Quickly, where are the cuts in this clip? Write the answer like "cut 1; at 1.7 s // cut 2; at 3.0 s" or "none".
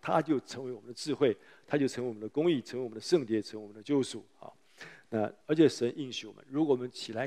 cut 1; at 5.4 s